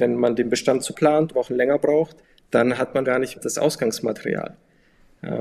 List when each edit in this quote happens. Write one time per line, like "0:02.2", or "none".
0:00.9
0:01.3
0:02.2
0:03.0
0:03.4